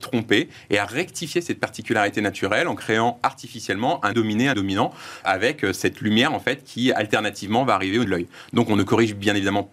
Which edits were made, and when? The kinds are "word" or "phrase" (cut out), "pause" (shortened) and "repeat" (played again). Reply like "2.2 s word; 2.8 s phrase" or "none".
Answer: 4.1 s word; 4.5 s word; 5.2 s word; 8.0 s word

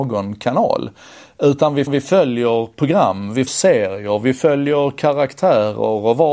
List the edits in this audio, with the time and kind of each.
1.9 s repeat; 3.5 s word

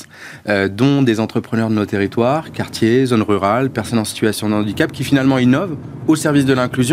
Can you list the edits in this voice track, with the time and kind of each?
none

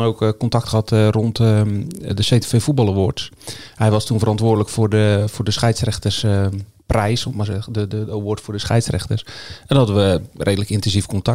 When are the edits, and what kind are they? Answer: none

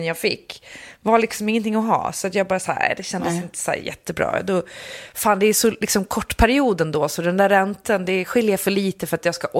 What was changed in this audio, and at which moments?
none

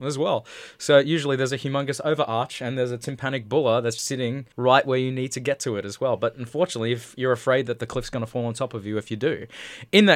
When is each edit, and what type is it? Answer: 4.0 s word; 4.5 s pause

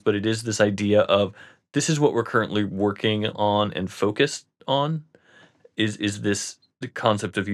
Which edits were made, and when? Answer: none

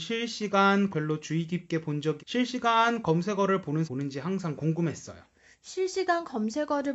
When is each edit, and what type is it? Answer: 0.9 s word; 2.2 s word; 3.8 s phrase

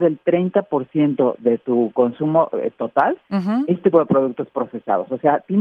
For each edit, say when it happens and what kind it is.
3.9 s word

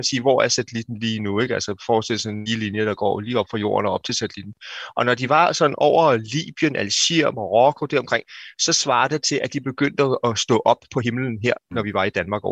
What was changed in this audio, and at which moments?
none

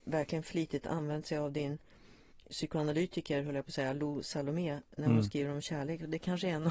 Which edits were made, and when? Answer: none

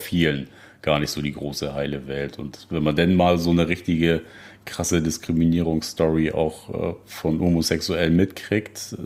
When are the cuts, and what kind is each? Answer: none

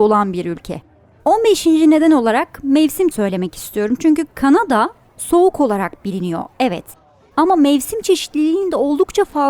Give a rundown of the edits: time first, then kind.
3.1 s word

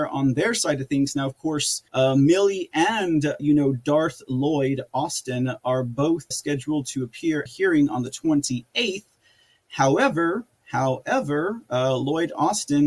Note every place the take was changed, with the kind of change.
1.9 s pause; 3.4 s word; 6.3 s word; 7.5 s phrase

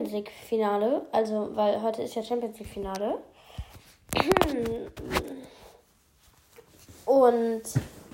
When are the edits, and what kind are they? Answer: none

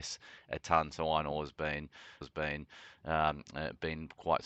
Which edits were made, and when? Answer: 2.2 s repeat

